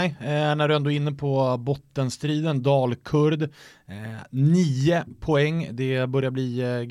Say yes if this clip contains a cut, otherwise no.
no